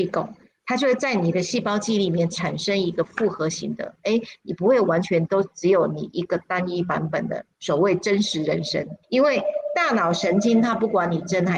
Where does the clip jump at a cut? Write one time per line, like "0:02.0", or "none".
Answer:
0:07.5
0:09.0